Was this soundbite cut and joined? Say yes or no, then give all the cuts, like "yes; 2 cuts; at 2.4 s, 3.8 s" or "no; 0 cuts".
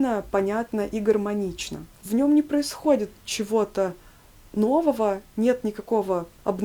no; 0 cuts